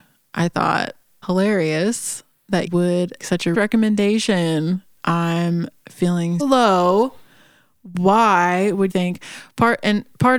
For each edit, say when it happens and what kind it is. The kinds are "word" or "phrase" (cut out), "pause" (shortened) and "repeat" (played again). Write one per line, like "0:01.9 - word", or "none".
0:01.2 - word
0:02.7 - word
0:03.2 - word
0:03.5 - word
0:05.0 - word
0:06.4 - word
0:08.9 - word